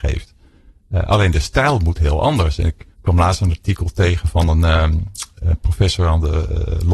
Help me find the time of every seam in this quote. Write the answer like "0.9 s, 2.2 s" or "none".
2.9 s